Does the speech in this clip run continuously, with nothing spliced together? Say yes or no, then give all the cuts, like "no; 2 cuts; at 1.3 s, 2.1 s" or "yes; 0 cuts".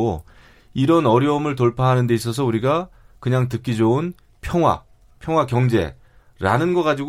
yes; 0 cuts